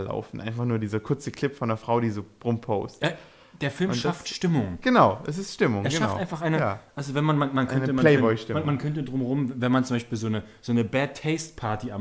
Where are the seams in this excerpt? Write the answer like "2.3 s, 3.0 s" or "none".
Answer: none